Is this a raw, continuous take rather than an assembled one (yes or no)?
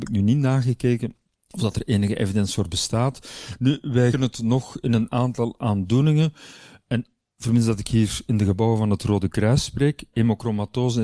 no